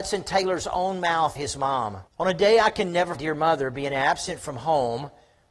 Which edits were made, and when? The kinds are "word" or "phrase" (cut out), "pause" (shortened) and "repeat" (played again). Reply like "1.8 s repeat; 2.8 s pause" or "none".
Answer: 1.4 s word; 2.1 s pause; 3.1 s phrase